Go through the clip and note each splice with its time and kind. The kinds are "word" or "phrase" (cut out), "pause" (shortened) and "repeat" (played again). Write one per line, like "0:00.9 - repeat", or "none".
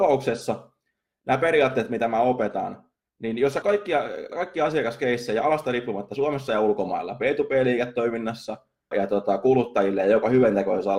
0:03.6 - word
0:04.3 - word
0:08.9 - word